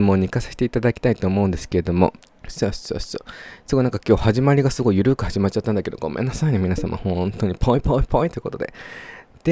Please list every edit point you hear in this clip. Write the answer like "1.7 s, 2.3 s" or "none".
2.2 s